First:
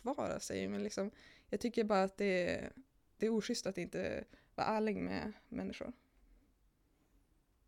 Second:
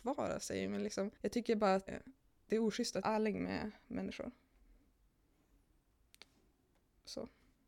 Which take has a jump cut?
second; 3 cuts; at 1.2 s, 1.9 s, 3.0 s

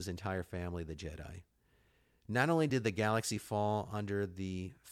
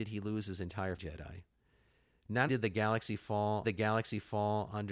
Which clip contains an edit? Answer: second; 3 cuts; at 1.0 s, 2.5 s, 3.6 s

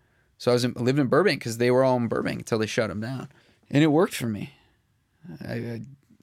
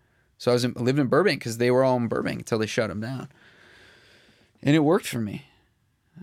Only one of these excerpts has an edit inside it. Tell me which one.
first; 1 cut; at 3.4 s

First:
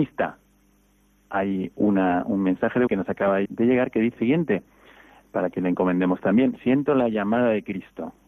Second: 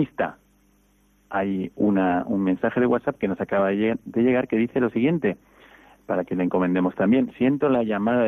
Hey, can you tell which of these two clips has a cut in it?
first; 3 cuts; at 2.9 s, 3.5 s, 4.2 s

